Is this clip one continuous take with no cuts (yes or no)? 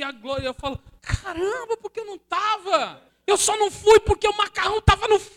no